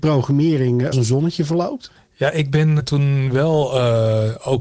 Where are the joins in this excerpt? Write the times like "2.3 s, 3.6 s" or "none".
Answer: 0.9 s, 2.0 s, 2.8 s